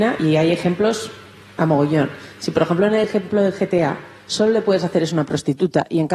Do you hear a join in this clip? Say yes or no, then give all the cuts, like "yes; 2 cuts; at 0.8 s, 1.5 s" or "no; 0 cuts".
no; 0 cuts